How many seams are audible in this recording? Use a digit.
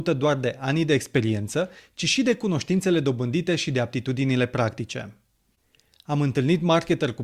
0